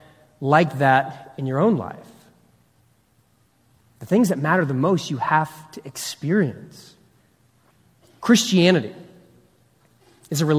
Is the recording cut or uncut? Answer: uncut